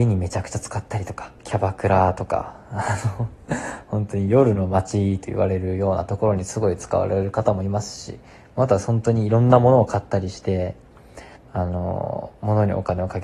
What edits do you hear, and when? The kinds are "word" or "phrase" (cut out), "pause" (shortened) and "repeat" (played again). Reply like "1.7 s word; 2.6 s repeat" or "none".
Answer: 1.4 s pause; 11.4 s pause

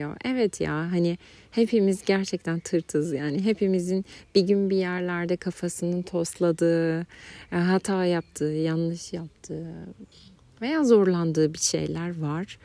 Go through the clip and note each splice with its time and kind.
none

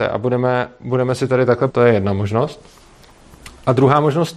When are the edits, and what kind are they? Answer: 1.7 s word

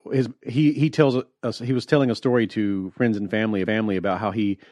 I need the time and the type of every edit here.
3.6 s repeat

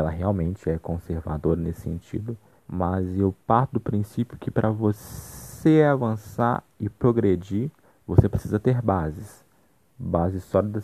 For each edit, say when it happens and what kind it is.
2.6 s pause; 3.4 s pause; 7.8 s pause

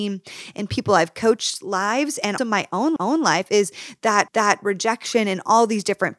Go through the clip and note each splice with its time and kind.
2.4 s word; 3.0 s repeat; 4.3 s repeat

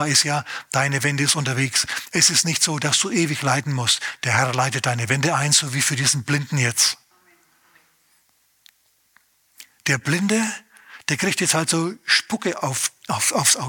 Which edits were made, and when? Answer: none

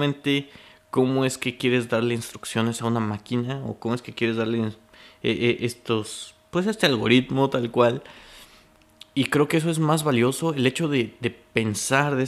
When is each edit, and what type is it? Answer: none

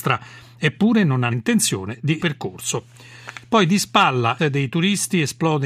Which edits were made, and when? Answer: 1.3 s word; 2.2 s phrase; 4.4 s word

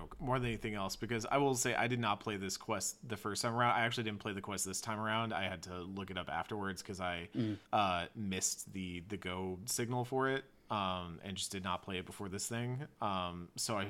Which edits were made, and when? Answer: 7.6 s pause

